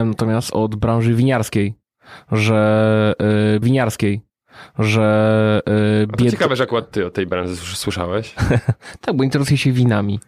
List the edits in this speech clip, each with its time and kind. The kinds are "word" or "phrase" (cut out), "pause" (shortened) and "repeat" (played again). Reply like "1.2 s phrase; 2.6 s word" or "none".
3.6 s repeat